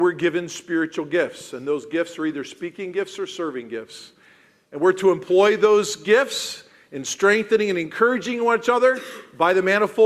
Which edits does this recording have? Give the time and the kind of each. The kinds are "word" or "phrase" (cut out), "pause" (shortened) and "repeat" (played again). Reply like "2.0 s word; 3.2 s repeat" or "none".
none